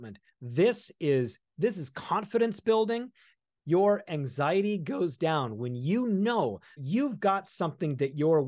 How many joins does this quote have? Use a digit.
1